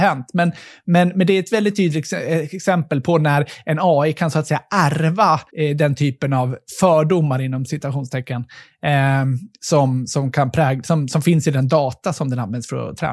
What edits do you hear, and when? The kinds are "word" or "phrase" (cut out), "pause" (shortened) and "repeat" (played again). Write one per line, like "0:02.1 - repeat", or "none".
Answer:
0:05.5 - pause